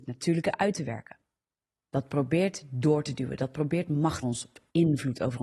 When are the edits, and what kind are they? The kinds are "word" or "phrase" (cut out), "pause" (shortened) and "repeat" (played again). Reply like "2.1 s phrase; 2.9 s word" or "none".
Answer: 4.2 s word